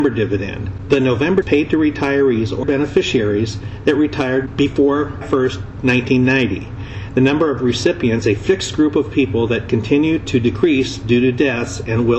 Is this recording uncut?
no; 4 cuts; at 1.4 s, 2.6 s, 5.2 s, 8.2 s

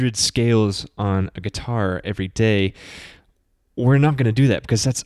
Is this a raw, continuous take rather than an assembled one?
yes; 0 cuts

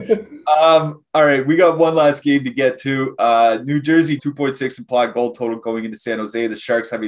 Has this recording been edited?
yes; 1 cut; at 4.2 s

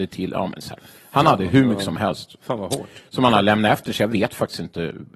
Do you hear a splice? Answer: no; 0 cuts

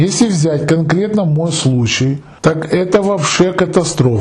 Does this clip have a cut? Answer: yes; 1 cut; at 2.4 s

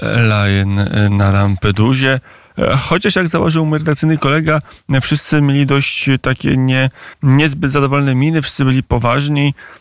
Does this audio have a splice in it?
yes; 1 cut; at 7.1 s

